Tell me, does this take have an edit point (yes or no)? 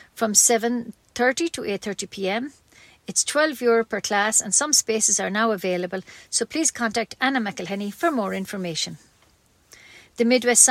no